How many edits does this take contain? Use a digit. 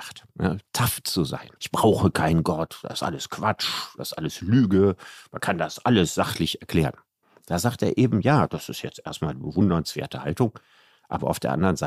2